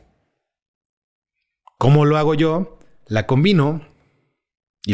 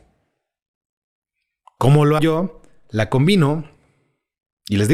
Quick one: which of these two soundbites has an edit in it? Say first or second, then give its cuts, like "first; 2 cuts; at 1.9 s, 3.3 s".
second; 1 cut; at 2.2 s